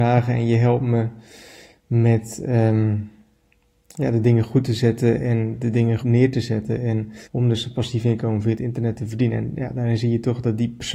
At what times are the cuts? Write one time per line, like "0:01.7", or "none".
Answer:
0:06.0
0:07.2